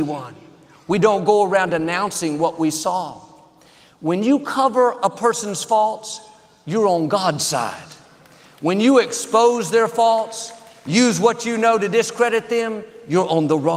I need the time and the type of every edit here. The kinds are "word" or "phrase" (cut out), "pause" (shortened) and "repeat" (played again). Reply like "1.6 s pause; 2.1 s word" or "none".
none